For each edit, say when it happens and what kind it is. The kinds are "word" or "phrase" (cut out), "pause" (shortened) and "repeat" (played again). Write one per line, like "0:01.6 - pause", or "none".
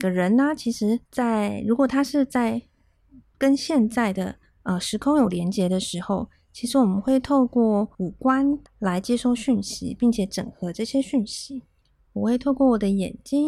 0:01.1 - pause
0:03.3 - word
0:04.4 - pause
0:07.9 - pause
0:08.7 - pause
0:11.8 - pause